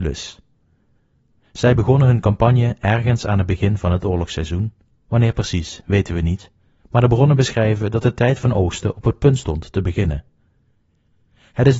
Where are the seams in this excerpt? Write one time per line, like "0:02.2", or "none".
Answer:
none